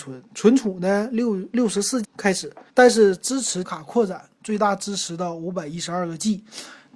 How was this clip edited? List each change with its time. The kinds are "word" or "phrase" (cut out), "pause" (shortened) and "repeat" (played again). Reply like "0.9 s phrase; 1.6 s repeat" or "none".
2.0 s word; 2.7 s pause; 3.6 s word